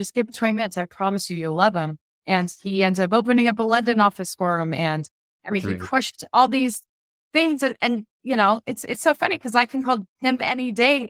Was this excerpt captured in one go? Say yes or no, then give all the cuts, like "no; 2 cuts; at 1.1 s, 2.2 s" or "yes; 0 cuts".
yes; 0 cuts